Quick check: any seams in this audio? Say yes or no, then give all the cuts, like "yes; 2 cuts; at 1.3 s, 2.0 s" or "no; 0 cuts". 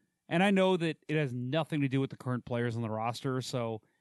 no; 0 cuts